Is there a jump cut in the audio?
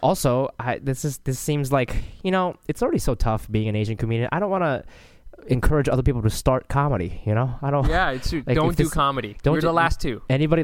no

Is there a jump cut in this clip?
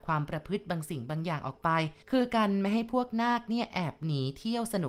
yes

